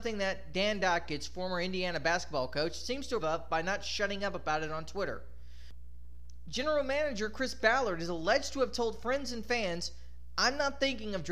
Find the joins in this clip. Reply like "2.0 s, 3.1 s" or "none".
3.2 s